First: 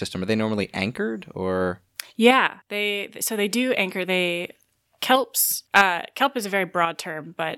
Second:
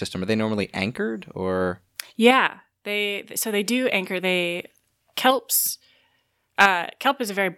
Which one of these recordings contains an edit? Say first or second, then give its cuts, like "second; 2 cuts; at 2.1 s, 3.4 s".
first; 2 cuts; at 2.6 s, 5.7 s